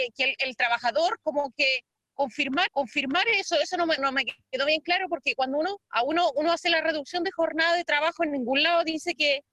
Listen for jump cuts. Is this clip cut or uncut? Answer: cut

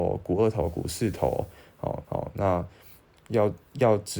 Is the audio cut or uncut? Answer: cut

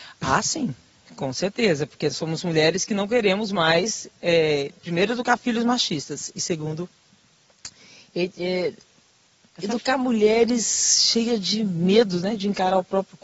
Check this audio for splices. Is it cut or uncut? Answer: uncut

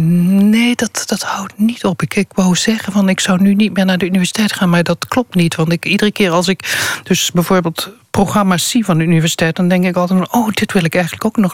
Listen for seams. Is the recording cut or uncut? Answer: uncut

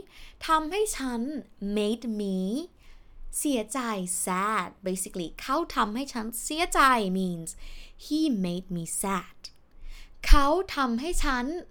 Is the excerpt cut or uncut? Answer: uncut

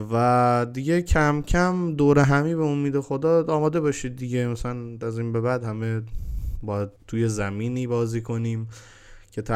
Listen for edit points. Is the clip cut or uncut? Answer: cut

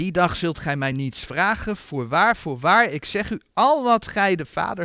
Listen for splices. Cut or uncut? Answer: uncut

